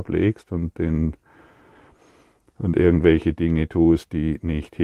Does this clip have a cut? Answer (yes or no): no